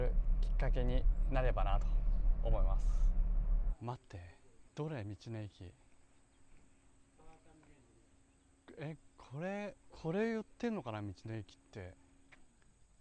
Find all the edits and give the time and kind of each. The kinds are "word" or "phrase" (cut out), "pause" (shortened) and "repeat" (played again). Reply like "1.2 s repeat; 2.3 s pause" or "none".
4.7 s pause; 9.8 s pause

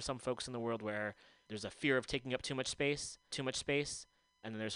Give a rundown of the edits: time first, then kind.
1.5 s word; 3.3 s repeat

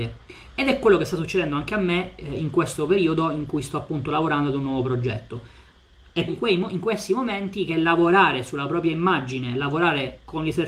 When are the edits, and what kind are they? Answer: 6.3 s word

